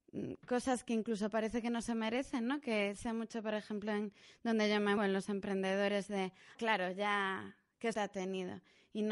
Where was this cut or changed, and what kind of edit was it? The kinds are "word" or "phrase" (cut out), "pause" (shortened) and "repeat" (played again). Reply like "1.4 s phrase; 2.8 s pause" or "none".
3.0 s word; 5.0 s word; 6.6 s word; 7.9 s word

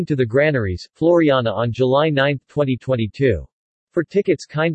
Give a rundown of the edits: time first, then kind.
3.7 s pause

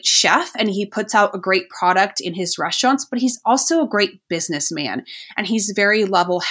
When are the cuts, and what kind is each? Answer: none

